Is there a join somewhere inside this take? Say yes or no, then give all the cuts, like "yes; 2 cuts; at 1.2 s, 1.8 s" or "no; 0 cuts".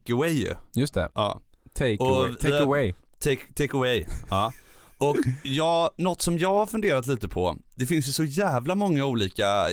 no; 0 cuts